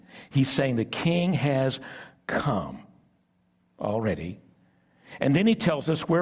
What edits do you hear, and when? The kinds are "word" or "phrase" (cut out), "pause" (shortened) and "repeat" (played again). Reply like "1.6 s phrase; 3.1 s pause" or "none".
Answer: none